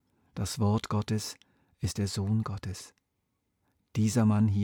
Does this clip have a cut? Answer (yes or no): no